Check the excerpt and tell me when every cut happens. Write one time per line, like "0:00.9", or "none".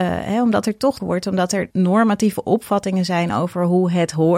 0:01.0
0:01.7